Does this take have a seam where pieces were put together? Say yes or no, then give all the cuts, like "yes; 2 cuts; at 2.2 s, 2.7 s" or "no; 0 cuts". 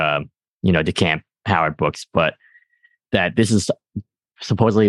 no; 0 cuts